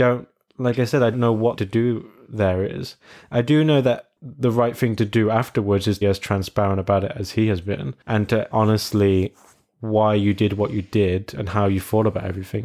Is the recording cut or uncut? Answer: cut